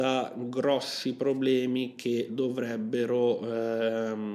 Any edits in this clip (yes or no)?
no